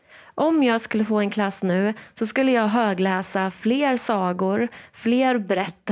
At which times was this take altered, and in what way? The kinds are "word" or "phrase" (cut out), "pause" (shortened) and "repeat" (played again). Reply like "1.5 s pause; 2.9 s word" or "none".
none